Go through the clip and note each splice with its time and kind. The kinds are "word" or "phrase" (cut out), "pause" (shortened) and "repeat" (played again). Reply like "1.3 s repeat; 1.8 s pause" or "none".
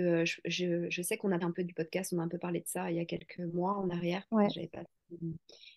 1.4 s word